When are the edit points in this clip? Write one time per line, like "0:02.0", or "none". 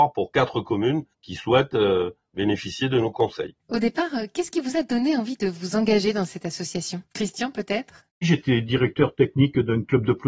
0:01.1
0:03.6
0:07.1
0:08.1